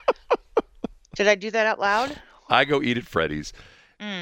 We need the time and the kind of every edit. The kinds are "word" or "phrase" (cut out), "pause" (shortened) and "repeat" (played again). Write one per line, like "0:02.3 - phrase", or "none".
none

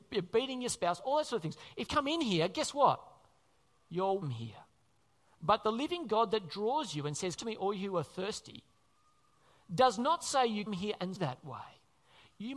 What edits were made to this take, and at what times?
0:01.9 - word
0:04.2 - word
0:07.4 - word
0:10.7 - word
0:11.2 - word

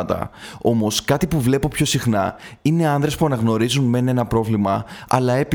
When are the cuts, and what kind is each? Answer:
none

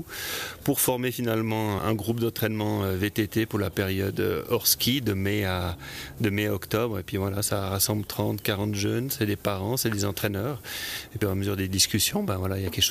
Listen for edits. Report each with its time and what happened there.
0:01.8 - word
0:11.2 - phrase

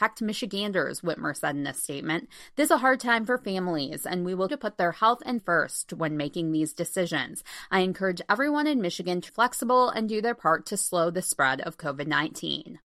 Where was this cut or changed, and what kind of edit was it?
0:02.7 - word
0:04.5 - word
0:05.4 - word
0:09.3 - word

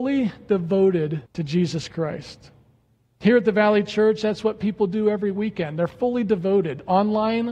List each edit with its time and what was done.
0:01.3 - pause

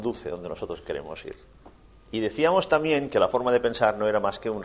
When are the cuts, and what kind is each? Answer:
none

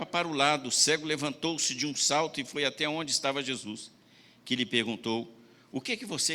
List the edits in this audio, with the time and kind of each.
none

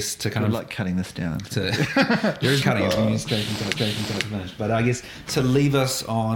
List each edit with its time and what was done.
0:02.6 - word
0:03.7 - repeat
0:05.3 - word

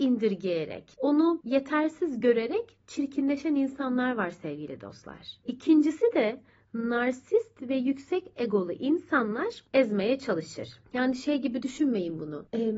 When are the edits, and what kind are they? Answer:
none

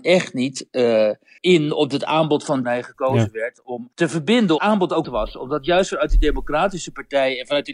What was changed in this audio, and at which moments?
0:01.4 - word
0:02.6 - phrase
0:03.9 - pause
0:04.6 - phrase
0:05.0 - word

